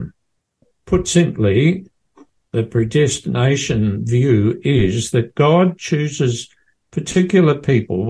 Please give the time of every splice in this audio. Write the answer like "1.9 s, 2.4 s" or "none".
none